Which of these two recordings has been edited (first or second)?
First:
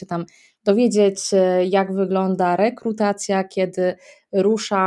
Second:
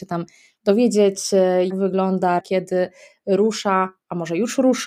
second